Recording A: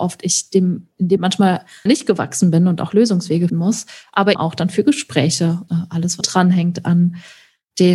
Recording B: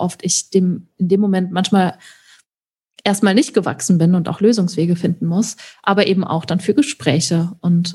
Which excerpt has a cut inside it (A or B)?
A